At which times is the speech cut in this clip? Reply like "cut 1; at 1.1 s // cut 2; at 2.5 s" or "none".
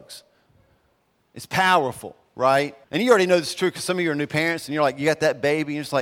cut 1; at 2.8 s